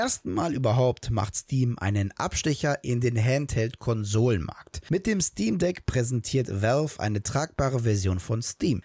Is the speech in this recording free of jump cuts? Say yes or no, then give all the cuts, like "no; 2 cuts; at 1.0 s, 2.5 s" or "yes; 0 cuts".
yes; 0 cuts